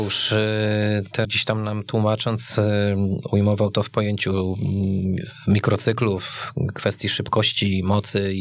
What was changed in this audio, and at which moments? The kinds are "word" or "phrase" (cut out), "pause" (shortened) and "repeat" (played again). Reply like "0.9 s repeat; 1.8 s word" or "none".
1.2 s word